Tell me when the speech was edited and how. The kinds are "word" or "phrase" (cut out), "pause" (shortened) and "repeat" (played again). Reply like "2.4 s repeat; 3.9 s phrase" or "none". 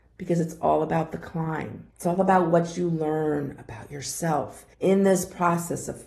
1.9 s pause; 4.7 s pause